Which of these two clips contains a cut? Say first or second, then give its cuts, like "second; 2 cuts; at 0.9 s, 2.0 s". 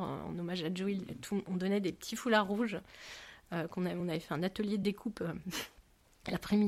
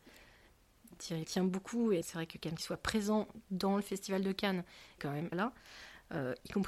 second; 5 cuts; at 1.2 s, 2.0 s, 2.6 s, 5.0 s, 5.3 s